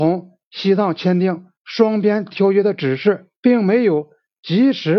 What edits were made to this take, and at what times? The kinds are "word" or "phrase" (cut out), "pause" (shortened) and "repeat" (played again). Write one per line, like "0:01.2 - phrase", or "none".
0:01.6 - pause
0:03.4 - pause